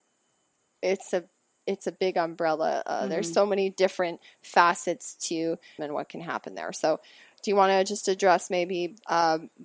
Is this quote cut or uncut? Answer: cut